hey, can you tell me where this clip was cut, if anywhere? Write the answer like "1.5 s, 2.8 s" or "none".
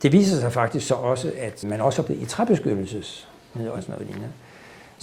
1.6 s, 2.1 s, 3.8 s